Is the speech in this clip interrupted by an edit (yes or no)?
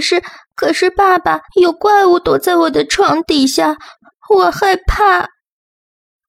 yes